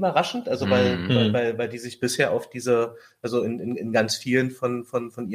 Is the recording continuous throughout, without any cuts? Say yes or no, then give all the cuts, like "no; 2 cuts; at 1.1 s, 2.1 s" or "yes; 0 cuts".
yes; 0 cuts